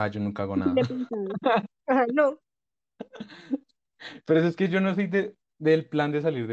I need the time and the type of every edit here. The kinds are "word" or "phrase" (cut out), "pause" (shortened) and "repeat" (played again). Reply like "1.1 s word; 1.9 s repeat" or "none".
5.4 s pause